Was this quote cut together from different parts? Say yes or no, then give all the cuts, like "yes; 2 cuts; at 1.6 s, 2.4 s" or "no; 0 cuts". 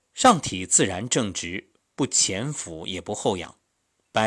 yes; 1 cut; at 1.8 s